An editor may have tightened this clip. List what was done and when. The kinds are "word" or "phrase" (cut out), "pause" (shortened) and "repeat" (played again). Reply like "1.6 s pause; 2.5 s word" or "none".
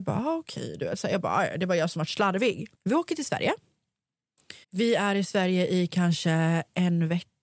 2.7 s pause; 4.6 s pause